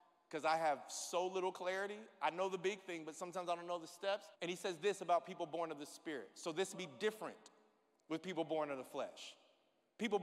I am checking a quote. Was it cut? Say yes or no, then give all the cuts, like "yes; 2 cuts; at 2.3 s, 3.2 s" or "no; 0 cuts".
yes; 2 cuts; at 4.3 s, 6.7 s